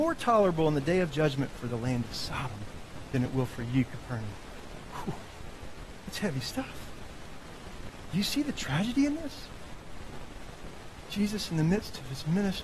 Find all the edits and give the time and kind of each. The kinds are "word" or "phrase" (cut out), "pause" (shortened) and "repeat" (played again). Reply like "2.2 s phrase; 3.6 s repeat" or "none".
none